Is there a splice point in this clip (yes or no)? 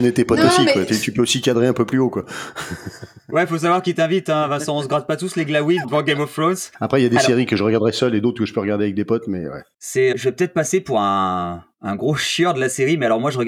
yes